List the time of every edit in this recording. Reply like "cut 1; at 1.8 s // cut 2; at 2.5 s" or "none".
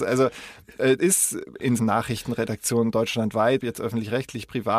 cut 1; at 1.0 s // cut 2; at 1.8 s // cut 3; at 3.6 s